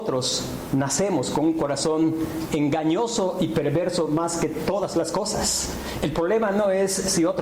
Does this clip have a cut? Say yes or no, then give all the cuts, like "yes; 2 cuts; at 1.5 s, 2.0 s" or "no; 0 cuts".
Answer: no; 0 cuts